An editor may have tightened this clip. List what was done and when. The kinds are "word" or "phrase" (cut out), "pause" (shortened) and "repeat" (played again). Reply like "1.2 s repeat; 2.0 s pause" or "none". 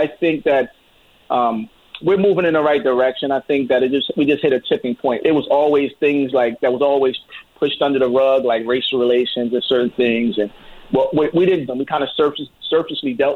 5.2 s word; 7.5 s pause; 11.7 s phrase